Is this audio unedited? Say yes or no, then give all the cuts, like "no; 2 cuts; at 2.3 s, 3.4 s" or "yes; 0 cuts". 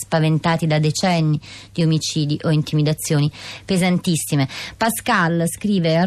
yes; 0 cuts